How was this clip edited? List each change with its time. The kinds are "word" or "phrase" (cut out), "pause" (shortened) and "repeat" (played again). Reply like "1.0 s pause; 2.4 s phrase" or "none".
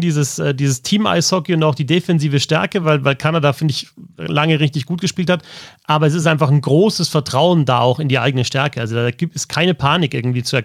none